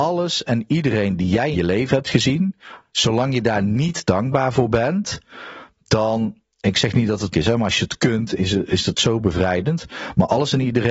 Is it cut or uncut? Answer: cut